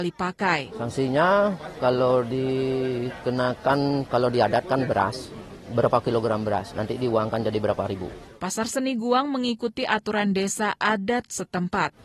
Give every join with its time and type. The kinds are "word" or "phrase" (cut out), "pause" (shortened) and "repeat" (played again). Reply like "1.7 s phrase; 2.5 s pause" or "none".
none